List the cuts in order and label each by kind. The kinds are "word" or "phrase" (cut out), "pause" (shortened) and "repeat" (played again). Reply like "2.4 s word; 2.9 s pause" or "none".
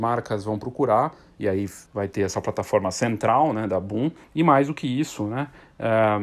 1.9 s pause; 4.2 s pause